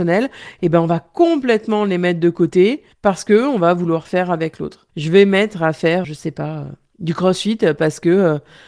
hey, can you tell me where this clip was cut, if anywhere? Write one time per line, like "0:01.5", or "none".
0:02.9
0:04.9
0:06.0